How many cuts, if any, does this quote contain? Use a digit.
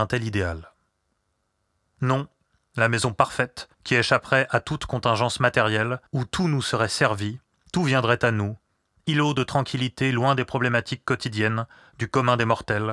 2